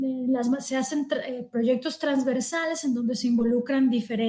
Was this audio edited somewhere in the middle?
no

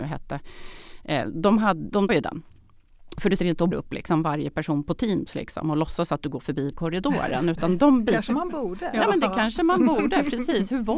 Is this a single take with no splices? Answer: no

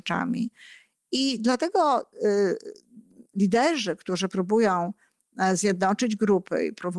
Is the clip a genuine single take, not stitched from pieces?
yes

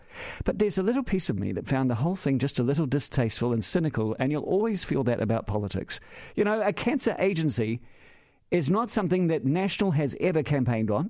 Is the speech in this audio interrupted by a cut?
no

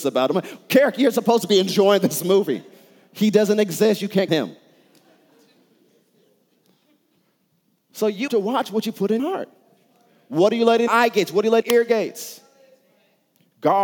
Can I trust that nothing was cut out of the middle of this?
no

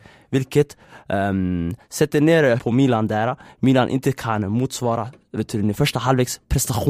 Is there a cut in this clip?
yes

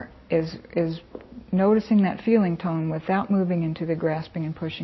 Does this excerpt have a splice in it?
no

